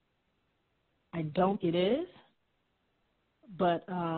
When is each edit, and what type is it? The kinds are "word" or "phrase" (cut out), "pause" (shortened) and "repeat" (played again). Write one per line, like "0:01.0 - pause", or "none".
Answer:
0:01.6 - word

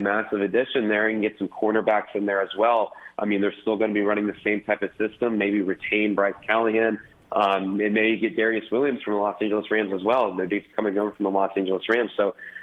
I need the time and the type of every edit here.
0:10.7 - word

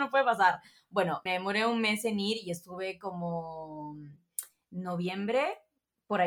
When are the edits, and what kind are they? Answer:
0:01.3 - word

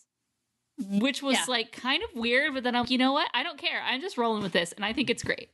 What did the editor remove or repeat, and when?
0:02.8 - word

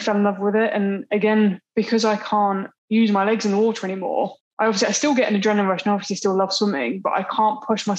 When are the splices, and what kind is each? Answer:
0:02.8 - pause

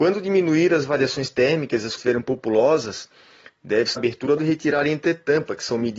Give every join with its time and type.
0:02.0 - word
0:04.0 - phrase
0:04.4 - word

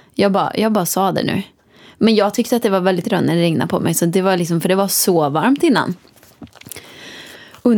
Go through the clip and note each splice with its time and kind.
0:03.0 - word

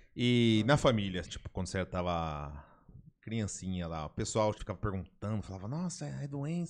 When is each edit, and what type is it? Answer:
0:01.2 - word
0:04.6 - word

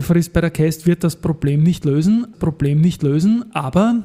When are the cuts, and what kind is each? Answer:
0:02.3 - repeat

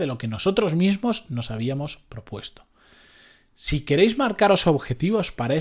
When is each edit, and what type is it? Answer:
none

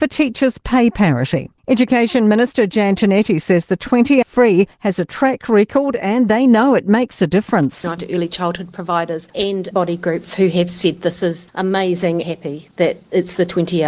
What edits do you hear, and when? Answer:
0:01.6 - pause
0:04.2 - word
0:04.7 - pause
0:08.0 - word
0:09.7 - phrase
0:12.2 - phrase

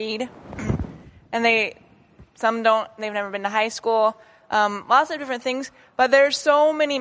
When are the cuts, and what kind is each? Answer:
none

